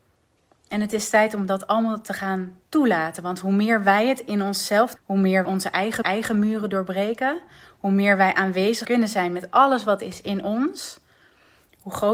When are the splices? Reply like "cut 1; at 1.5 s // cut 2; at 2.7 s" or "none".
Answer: cut 1; at 5.0 s // cut 2; at 5.4 s // cut 3; at 6.0 s // cut 4; at 8.8 s

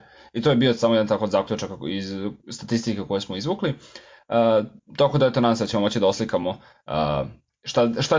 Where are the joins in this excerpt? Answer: none

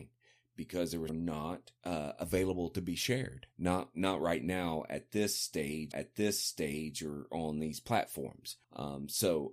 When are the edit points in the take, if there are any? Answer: cut 1; at 1.1 s // cut 2; at 1.8 s // cut 3; at 3.5 s // cut 4; at 5.9 s // cut 5; at 8.6 s

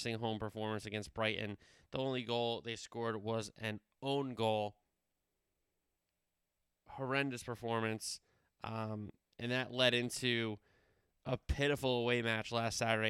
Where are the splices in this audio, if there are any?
none

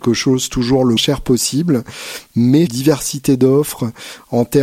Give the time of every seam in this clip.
cut 1; at 1.0 s // cut 2; at 2.7 s

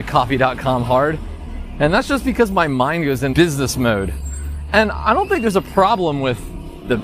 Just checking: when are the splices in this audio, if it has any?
cut 1; at 3.3 s

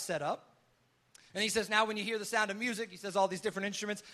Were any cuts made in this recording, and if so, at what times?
none

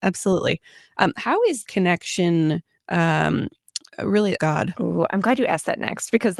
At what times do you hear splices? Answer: cut 1; at 1.7 s // cut 2; at 4.4 s

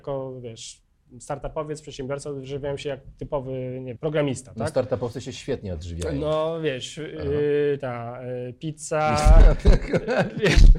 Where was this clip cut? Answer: cut 1; at 4.0 s // cut 2; at 7.8 s

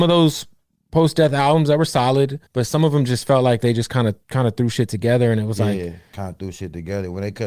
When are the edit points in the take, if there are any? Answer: cut 1; at 2.5 s // cut 2; at 4.2 s

